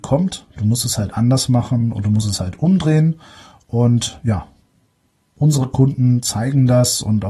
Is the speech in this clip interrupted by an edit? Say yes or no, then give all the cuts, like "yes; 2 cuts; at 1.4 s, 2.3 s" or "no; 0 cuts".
no; 0 cuts